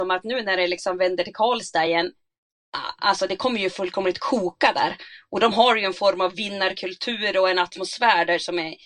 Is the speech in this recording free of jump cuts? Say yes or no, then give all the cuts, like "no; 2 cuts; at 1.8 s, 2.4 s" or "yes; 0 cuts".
yes; 0 cuts